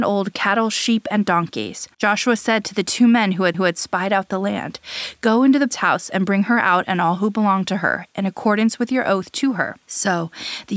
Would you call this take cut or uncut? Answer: cut